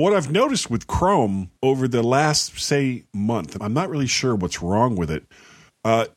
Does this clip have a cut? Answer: yes; 2 cuts; at 1.6 s, 3.6 s

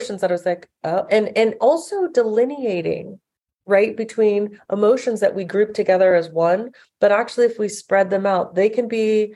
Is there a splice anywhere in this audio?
no; 0 cuts

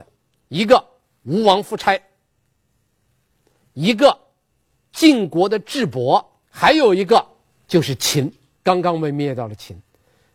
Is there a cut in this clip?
yes; 1 cut; at 6.4 s

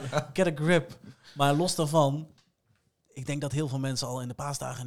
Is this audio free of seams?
yes; 0 cuts

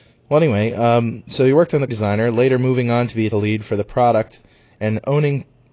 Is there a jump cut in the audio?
yes; 2 cuts; at 1.9 s, 3.3 s

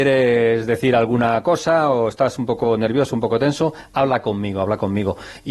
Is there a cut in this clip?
no; 0 cuts

